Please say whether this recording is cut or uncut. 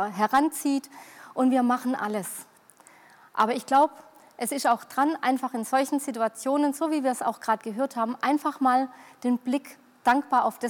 uncut